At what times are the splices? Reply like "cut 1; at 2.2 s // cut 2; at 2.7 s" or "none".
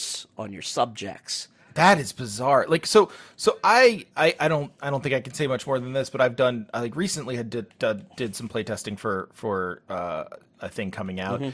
cut 1; at 1.6 s